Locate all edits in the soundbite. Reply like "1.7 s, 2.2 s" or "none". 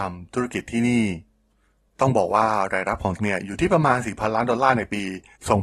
3.2 s